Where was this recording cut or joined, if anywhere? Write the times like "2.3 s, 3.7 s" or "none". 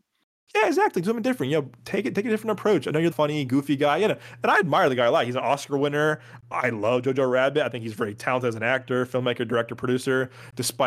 3.1 s